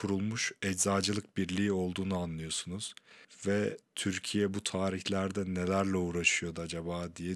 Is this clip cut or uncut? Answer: uncut